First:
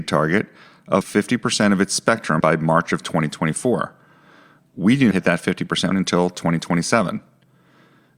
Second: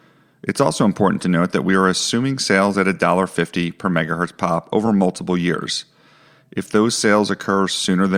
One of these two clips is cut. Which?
first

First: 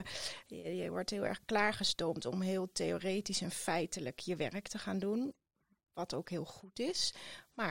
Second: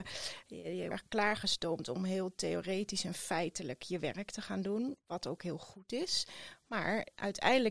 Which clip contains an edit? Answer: second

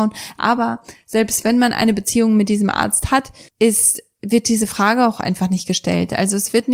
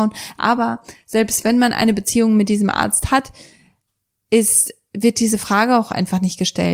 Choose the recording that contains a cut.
first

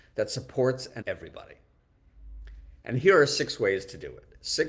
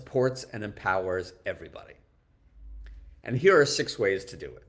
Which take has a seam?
first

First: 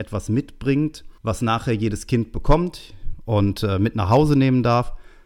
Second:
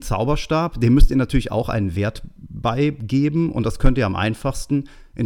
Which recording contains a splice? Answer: first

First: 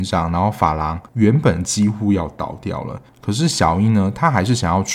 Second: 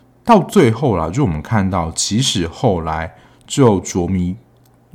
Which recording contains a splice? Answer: first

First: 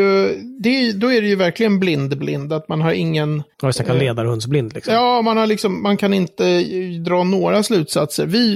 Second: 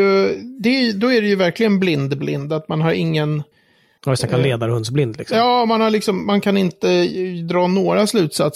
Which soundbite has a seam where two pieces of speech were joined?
first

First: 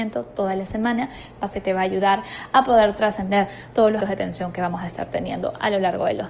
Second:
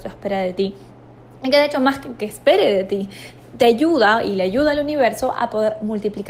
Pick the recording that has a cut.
first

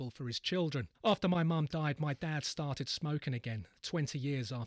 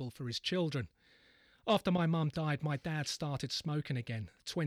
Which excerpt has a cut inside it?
first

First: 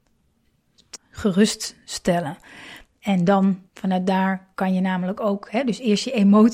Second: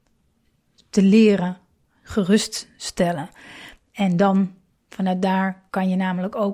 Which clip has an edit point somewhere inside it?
first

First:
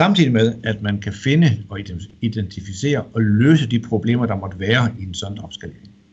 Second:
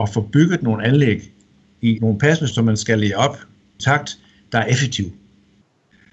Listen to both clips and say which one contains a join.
second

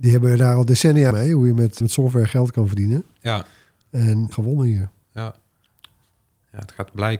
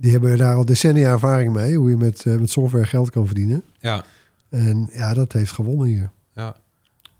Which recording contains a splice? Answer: first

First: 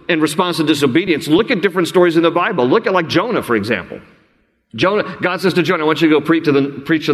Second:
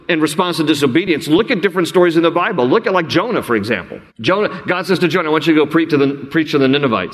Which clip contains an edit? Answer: second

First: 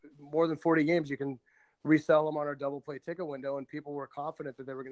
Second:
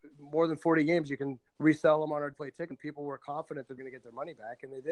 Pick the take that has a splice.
second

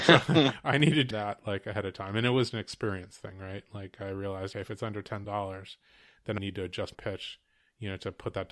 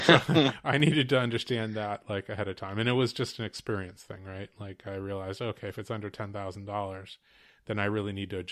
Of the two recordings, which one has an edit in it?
first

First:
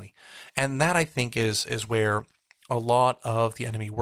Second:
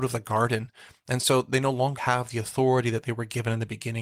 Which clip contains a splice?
second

